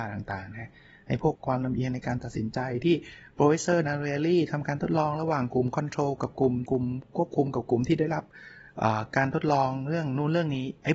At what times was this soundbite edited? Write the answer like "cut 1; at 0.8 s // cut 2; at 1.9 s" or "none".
cut 1; at 1.3 s // cut 2; at 3.8 s // cut 3; at 6.7 s